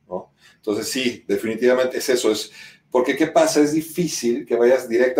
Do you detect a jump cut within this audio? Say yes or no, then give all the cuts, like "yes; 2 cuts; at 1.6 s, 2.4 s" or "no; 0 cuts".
yes; 1 cut; at 1.9 s